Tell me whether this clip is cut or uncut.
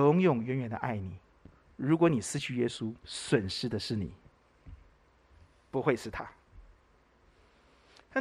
cut